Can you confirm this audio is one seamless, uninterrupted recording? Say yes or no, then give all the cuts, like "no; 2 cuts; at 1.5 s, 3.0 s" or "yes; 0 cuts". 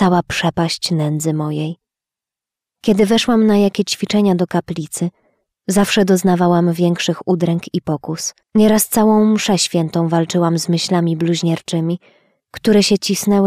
no; 1 cut; at 8.4 s